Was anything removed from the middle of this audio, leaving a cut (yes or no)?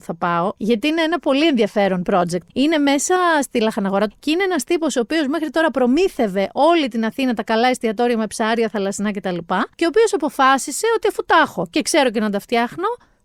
yes